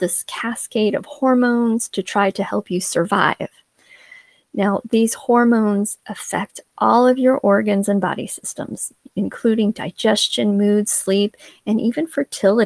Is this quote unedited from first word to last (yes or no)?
yes